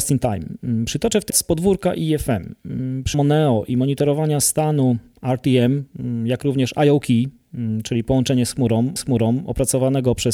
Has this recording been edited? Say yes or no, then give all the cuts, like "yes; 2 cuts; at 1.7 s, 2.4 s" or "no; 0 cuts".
yes; 3 cuts; at 1.3 s, 3.1 s, 9.0 s